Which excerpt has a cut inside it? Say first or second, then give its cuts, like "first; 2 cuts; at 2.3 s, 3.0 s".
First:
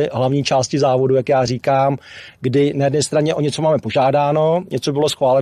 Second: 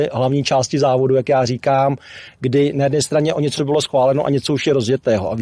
second; 1 cut; at 3.6 s